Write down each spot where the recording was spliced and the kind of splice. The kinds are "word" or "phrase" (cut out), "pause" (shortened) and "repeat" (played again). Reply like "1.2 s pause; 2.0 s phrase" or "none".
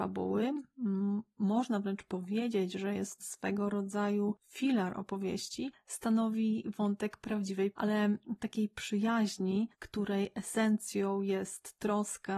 3.2 s word; 7.7 s word; 9.7 s pause

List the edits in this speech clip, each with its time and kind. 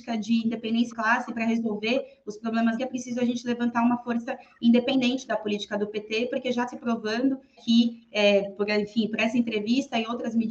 0.9 s word; 2.8 s phrase; 6.7 s word; 7.6 s word

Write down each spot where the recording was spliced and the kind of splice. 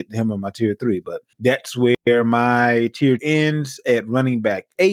1.3 s pause; 3.2 s word

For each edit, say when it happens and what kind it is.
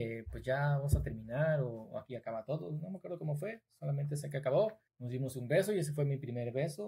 4.9 s pause

